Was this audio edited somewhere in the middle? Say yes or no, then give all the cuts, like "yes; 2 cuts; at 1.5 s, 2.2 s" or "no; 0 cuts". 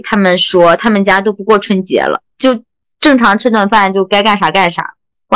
no; 0 cuts